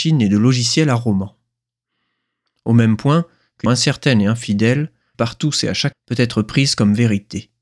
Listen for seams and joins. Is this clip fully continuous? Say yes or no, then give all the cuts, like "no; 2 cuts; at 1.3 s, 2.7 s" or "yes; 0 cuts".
no; 3 cuts; at 3.7 s, 5.1 s, 5.9 s